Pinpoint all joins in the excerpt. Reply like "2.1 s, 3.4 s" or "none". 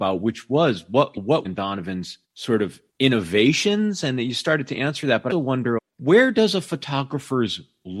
1.4 s, 2.2 s, 2.9 s, 5.3 s, 5.8 s